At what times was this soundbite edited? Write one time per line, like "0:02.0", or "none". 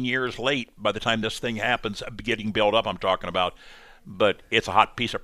none